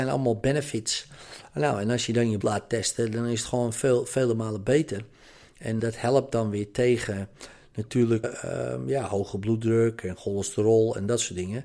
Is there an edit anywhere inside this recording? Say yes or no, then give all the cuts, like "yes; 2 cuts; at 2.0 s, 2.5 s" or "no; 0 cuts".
yes; 3 cuts; at 2.4 s, 5.8 s, 8.2 s